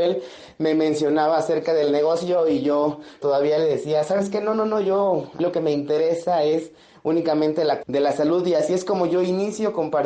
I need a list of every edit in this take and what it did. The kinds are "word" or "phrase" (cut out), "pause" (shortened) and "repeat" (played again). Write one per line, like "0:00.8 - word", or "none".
0:03.2 - word
0:05.4 - word
0:07.8 - word